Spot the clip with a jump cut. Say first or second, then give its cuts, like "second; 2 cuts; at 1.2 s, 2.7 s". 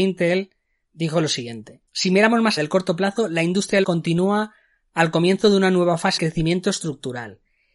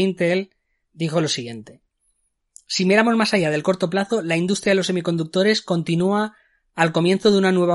first; 4 cuts; at 1.9 s, 2.6 s, 3.8 s, 6.2 s